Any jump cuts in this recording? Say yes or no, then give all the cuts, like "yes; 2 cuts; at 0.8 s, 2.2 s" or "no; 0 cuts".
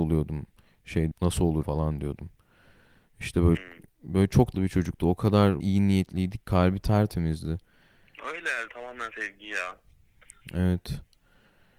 yes; 8 cuts; at 1.1 s, 1.6 s, 3.6 s, 4.5 s, 5.6 s, 6.4 s, 8.7 s, 9.1 s